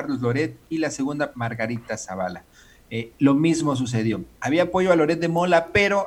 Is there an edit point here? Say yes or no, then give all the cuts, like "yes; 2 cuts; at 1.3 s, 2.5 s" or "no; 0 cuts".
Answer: yes; 1 cut; at 1.3 s